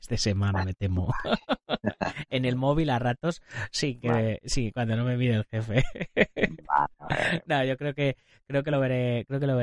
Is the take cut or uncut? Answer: uncut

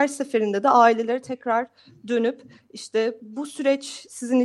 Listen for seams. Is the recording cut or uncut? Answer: uncut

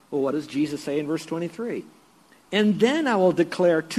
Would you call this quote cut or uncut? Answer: uncut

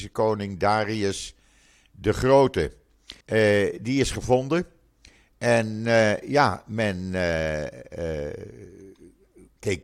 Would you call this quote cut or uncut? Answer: cut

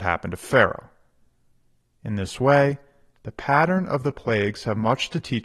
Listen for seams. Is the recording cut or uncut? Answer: uncut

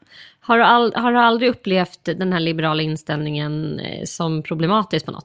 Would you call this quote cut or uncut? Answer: uncut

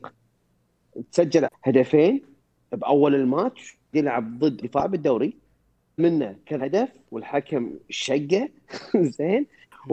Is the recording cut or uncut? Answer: cut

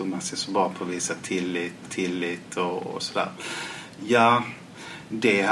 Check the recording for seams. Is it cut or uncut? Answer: cut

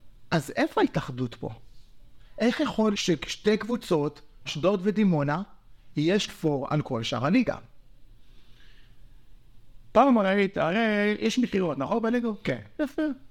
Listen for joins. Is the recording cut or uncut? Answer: cut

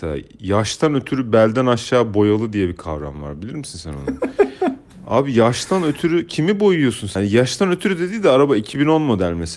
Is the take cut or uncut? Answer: uncut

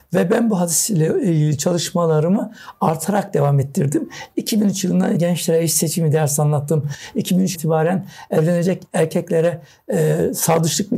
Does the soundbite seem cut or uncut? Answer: cut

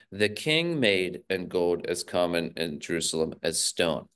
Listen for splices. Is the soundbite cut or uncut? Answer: cut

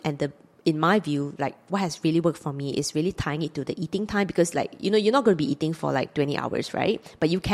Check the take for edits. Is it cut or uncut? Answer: uncut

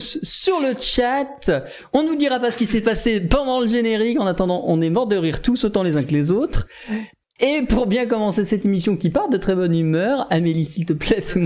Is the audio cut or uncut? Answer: uncut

